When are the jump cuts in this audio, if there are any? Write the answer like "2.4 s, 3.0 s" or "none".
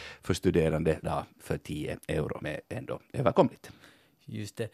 1.0 s, 2.4 s